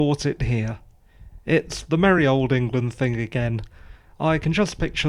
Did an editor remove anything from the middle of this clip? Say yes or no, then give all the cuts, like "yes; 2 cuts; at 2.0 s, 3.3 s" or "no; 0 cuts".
no; 0 cuts